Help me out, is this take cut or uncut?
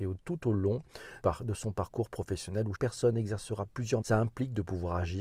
cut